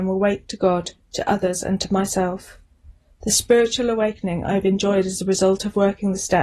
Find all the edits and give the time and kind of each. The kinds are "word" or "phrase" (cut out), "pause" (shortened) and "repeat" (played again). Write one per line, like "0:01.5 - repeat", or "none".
none